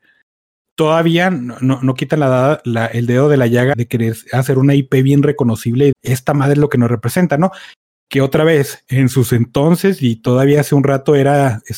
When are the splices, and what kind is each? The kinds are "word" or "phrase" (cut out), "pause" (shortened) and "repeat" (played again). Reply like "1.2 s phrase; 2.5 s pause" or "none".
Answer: 3.7 s word; 5.9 s word